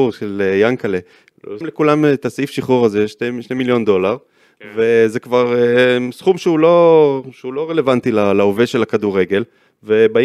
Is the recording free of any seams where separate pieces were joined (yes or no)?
no